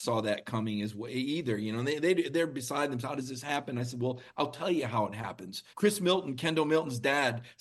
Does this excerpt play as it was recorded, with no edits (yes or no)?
no